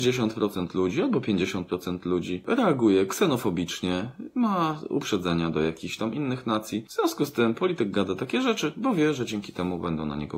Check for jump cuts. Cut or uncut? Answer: uncut